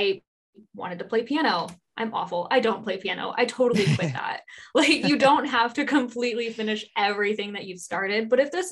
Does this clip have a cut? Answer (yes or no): no